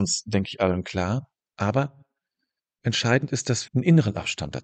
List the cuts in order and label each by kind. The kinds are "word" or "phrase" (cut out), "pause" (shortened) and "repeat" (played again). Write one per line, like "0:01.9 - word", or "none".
0:03.7 - word